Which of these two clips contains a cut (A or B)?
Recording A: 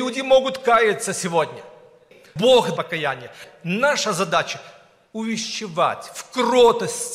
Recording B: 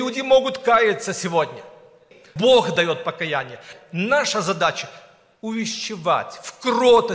A